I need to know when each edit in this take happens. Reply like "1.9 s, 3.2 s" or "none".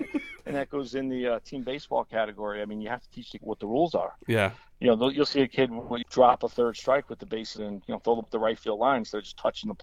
3.4 s, 6.0 s, 7.6 s, 8.2 s